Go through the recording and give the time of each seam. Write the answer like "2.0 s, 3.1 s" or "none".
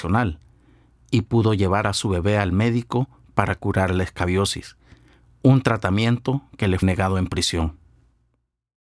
6.8 s